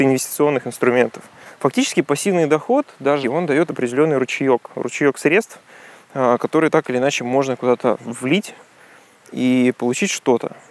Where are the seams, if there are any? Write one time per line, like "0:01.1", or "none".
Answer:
0:03.2